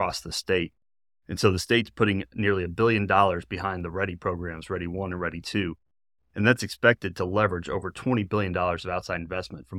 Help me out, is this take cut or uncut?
uncut